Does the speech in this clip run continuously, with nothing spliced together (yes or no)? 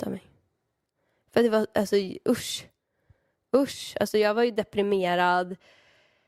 yes